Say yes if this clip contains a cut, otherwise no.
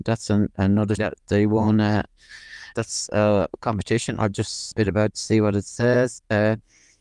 yes